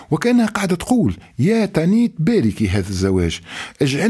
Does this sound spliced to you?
no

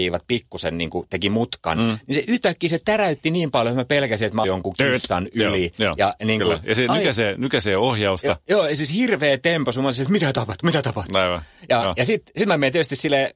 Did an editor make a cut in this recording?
yes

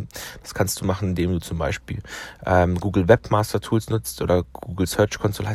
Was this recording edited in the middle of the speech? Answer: no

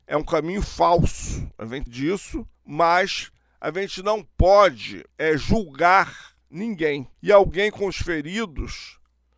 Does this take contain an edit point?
yes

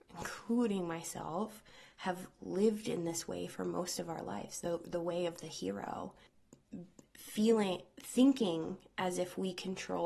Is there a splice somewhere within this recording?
no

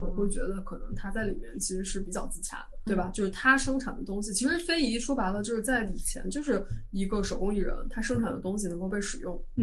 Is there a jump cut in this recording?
yes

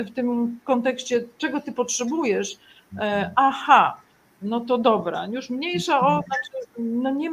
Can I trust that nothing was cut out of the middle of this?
yes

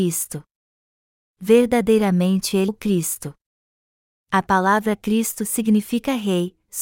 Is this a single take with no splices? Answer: no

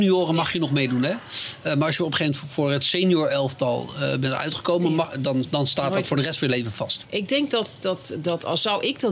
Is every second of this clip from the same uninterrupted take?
yes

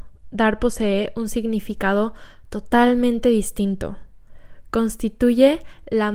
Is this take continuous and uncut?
yes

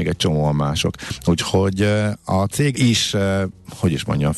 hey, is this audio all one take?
no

